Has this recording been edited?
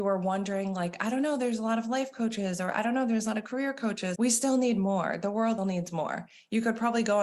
yes; 2 cuts; at 4.2 s, 5.6 s

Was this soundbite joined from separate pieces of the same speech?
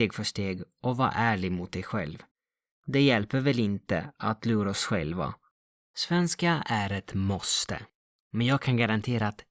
no; 0 cuts

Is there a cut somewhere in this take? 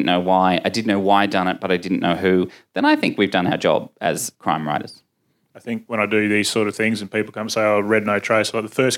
no; 0 cuts

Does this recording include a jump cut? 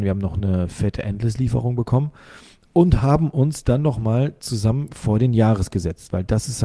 no; 0 cuts

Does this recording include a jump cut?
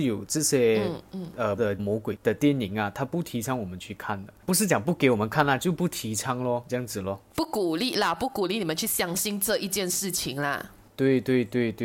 yes; 2 cuts; at 1.6 s, 6.7 s

